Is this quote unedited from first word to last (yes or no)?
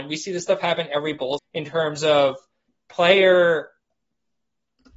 no